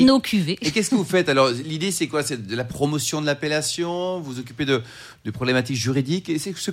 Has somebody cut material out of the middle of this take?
no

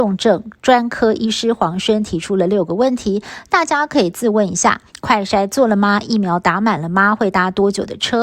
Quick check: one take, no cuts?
no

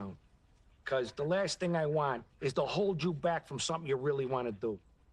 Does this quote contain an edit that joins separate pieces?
yes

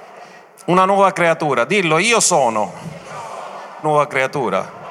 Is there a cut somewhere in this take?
yes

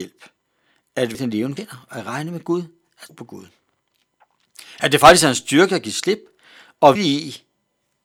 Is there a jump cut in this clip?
yes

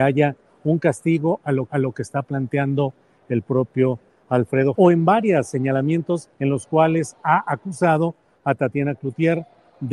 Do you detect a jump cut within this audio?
yes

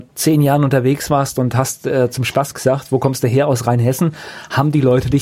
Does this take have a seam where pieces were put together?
no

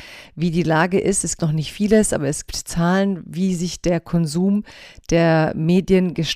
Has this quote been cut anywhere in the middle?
yes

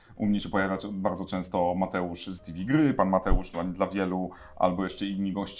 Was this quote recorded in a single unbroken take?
yes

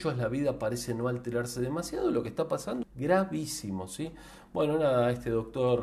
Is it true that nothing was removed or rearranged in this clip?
no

